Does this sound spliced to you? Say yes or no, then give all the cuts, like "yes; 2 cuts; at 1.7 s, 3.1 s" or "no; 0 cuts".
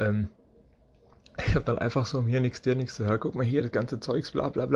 no; 0 cuts